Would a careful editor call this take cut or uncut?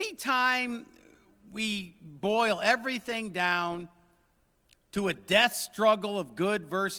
uncut